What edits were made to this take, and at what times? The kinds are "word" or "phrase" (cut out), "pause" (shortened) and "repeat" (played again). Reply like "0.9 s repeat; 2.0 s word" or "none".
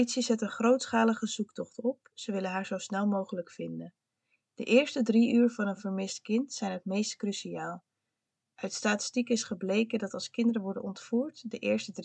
none